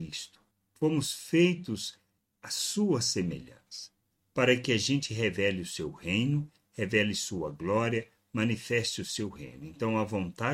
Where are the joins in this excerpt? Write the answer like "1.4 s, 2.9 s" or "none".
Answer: none